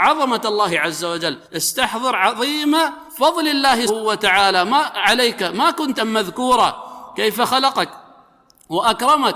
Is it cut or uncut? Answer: cut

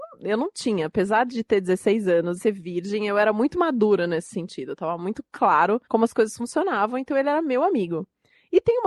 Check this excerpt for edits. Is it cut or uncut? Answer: cut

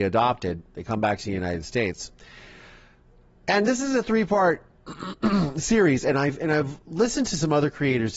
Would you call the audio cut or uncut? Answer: uncut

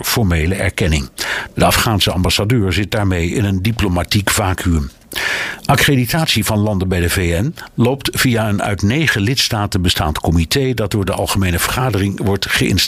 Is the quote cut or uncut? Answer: uncut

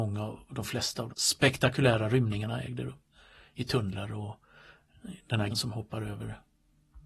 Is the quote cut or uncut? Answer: cut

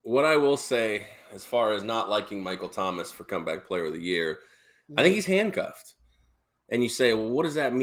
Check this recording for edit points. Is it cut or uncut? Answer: uncut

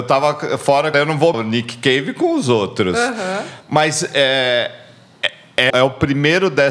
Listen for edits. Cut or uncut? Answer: cut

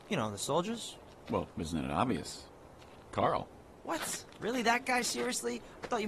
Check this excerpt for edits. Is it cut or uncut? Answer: uncut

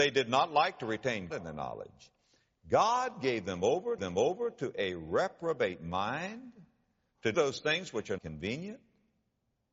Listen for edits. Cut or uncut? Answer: cut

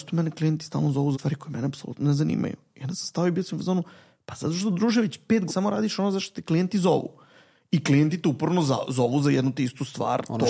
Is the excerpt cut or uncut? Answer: cut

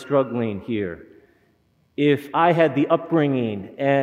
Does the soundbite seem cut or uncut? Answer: uncut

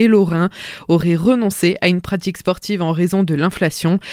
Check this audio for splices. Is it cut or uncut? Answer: uncut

